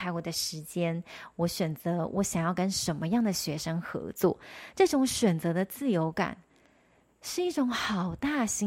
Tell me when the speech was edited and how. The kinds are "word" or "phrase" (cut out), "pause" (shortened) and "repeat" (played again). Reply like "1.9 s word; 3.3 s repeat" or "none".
none